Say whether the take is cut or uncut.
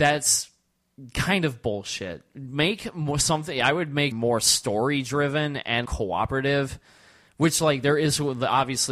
cut